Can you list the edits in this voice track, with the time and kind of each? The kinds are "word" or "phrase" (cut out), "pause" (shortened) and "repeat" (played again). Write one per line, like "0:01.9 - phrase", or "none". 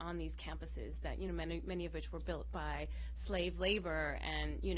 none